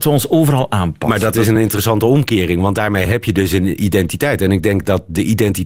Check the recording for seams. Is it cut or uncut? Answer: uncut